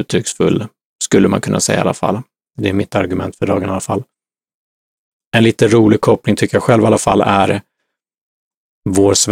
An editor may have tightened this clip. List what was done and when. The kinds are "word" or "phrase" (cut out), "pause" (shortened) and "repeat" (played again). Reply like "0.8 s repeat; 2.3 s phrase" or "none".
none